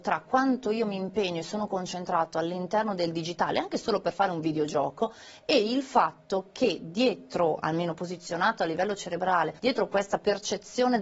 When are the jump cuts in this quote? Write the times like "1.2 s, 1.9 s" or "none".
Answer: 9.6 s